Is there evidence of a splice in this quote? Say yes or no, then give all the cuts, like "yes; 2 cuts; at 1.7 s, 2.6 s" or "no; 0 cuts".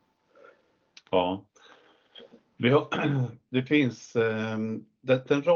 no; 0 cuts